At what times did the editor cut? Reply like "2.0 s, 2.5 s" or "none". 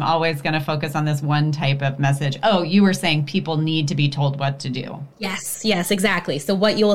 5.1 s